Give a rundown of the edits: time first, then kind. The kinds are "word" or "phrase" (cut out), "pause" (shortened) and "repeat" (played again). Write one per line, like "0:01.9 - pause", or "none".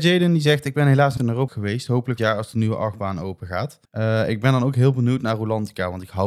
0:01.2 - word
0:01.5 - word
0:02.2 - word